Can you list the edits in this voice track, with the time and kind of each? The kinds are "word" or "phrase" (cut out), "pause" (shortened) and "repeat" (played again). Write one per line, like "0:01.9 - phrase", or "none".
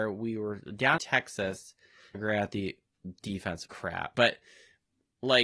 0:01.0 - word
0:02.1 - word
0:03.7 - word
0:04.1 - word